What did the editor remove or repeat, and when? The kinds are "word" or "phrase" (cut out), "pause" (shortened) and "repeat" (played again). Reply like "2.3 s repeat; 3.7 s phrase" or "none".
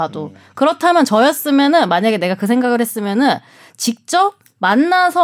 none